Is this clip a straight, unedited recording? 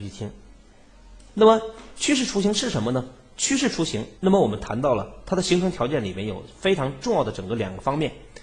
no; 1 cut; at 4.2 s

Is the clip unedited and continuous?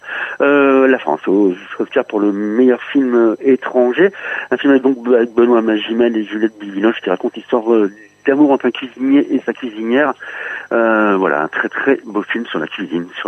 yes; 0 cuts

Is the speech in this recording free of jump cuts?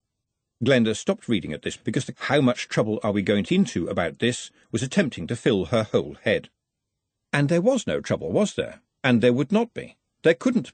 no; 3 cuts; at 1.8 s, 2.1 s, 3.5 s

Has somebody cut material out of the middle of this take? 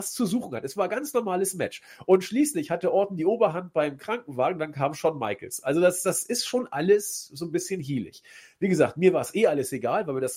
no; 0 cuts

